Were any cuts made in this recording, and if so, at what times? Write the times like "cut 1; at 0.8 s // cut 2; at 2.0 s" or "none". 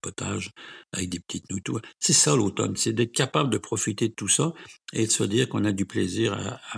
none